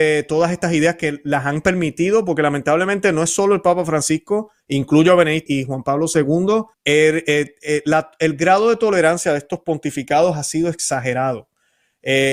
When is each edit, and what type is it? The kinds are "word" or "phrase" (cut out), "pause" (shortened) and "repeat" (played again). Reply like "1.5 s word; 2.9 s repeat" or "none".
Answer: 4.6 s pause; 5.5 s word; 6.7 s pause